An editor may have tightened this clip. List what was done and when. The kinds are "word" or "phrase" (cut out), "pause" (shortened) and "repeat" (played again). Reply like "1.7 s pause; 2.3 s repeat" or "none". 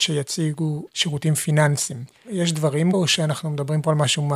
2.9 s word